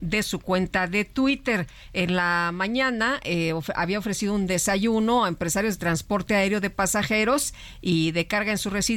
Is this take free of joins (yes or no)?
yes